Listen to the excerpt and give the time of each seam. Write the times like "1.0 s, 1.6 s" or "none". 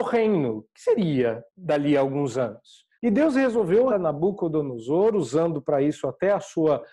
1.5 s, 2.9 s, 3.9 s